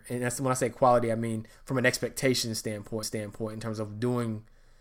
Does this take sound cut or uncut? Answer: cut